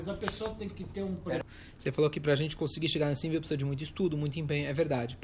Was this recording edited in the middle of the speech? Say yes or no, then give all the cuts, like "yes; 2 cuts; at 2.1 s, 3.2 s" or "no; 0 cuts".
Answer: no; 0 cuts